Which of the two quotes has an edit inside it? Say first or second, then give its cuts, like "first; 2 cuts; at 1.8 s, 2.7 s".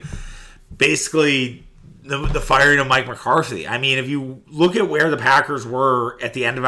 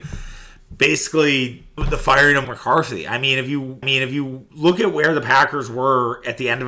second; 3 cuts; at 1.8 s, 2.4 s, 3.8 s